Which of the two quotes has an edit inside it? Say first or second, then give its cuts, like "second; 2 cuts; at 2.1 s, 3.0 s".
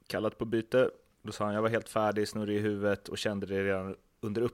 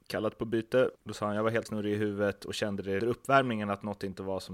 second; 3 cuts; at 1.0 s, 1.7 s, 3.0 s